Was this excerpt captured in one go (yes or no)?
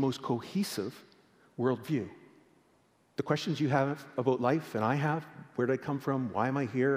yes